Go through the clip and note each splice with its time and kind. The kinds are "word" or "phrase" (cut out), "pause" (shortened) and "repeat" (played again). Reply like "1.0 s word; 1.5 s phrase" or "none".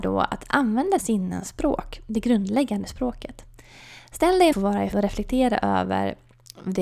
1.0 s phrase; 4.5 s phrase; 4.9 s word